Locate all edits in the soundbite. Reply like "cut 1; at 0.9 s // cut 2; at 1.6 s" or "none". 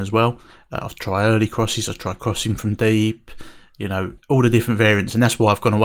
cut 1; at 4.2 s